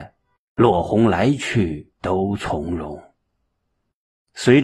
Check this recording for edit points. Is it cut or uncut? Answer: cut